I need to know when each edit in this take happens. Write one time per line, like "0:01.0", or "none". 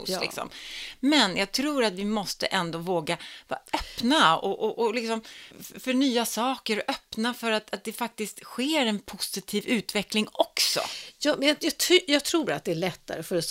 0:05.5